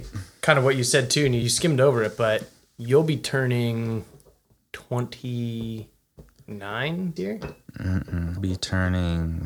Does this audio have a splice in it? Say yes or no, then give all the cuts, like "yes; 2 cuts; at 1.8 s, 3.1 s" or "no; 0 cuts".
yes; 4 cuts; at 1.4 s, 2.7 s, 7.2 s, 8.4 s